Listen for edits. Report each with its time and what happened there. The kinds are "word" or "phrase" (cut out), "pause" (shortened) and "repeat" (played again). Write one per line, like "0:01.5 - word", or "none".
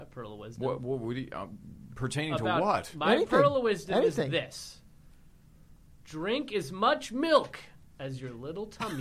none